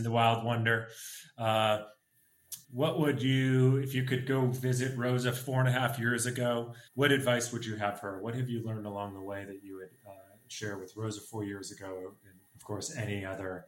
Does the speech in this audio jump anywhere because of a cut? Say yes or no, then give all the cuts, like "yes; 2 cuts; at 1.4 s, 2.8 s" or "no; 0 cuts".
yes; 3 cuts; at 2.6 s, 6.9 s, 12.5 s